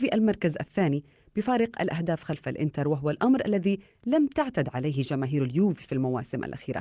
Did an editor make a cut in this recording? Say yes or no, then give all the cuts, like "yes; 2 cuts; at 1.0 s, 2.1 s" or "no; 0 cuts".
no; 0 cuts